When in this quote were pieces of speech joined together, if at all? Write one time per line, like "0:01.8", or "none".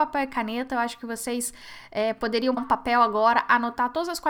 0:02.6